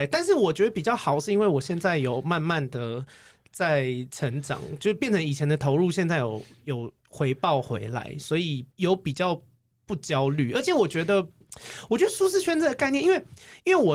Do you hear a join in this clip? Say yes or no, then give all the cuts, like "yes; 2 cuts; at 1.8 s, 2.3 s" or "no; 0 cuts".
yes; 1 cut; at 8.7 s